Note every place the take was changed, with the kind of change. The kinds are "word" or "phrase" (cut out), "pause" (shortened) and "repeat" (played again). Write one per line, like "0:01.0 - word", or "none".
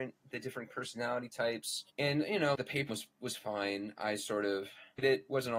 0:01.9 - pause
0:02.5 - word
0:02.9 - word